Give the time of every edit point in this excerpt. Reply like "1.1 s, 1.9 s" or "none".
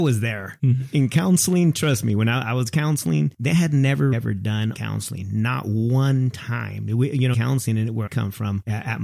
4.1 s, 4.7 s, 7.3 s, 8.1 s